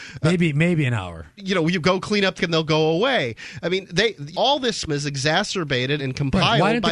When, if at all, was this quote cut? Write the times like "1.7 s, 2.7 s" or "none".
1.4 s, 2.4 s, 4.3 s, 4.9 s, 6.0 s